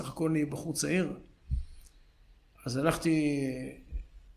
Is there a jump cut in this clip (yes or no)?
no